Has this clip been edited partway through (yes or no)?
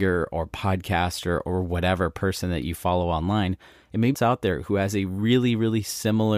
yes